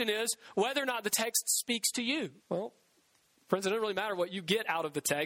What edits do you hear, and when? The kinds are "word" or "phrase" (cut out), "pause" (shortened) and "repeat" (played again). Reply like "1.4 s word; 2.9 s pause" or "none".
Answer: 2.4 s pause